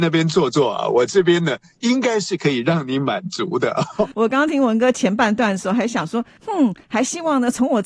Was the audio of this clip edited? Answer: no; 0 cuts

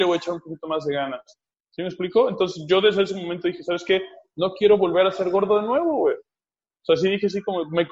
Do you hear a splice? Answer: no; 0 cuts

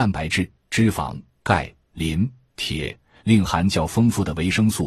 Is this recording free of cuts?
yes; 0 cuts

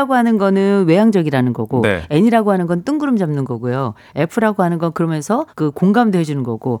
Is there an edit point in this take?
yes; 1 cut; at 5.5 s

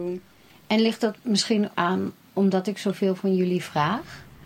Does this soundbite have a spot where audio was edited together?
yes; 2 cuts; at 1.7 s, 2.3 s

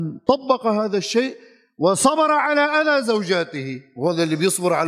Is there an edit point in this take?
no; 0 cuts

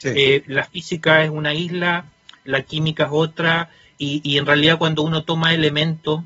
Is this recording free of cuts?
yes; 0 cuts

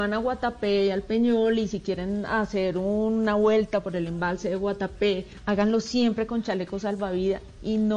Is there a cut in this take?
no; 0 cuts

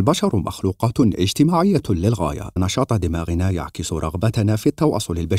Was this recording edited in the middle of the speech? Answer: yes; 1 cut; at 2.6 s

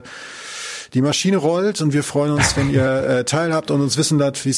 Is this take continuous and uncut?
yes; 0 cuts

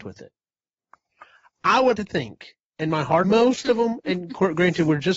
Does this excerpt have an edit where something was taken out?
yes; 2 cuts; at 1.9 s, 3.2 s

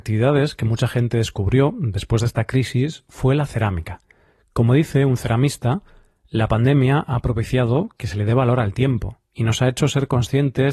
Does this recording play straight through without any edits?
yes; 0 cuts

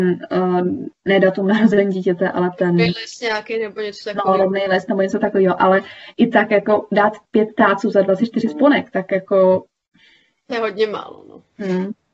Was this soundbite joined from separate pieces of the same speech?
no; 0 cuts

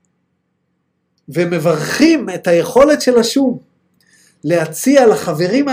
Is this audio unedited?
yes; 0 cuts

